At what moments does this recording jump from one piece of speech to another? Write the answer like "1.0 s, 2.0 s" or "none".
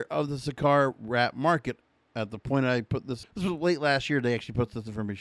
3.2 s